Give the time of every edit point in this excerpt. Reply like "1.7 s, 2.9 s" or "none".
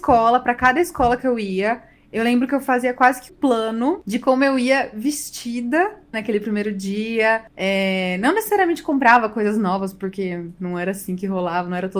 3.3 s, 6.1 s, 10.6 s